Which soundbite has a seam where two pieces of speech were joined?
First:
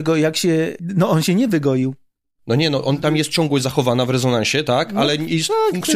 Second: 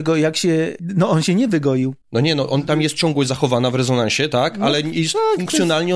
second; 1 cut; at 2.0 s

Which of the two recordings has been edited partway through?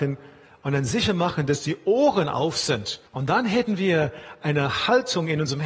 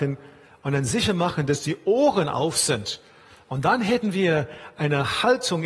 first; 1 cut; at 3.1 s

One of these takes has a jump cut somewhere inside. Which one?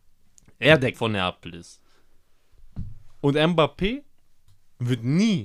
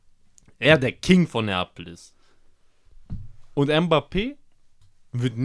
first; 1 cut; at 0.9 s

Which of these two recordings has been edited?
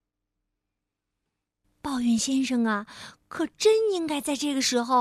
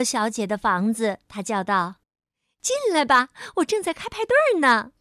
second; 2 cuts; at 1.2 s, 2.0 s

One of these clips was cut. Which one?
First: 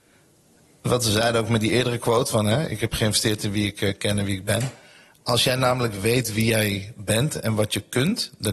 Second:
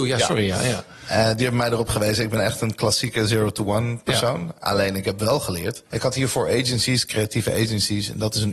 second; 1 cut; at 5.9 s

